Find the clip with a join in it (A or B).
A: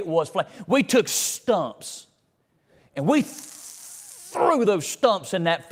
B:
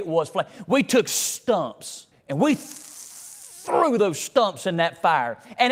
B